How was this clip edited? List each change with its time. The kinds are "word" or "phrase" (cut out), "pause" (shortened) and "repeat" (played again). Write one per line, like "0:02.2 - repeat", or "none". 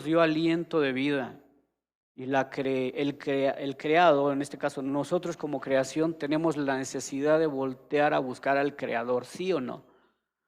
none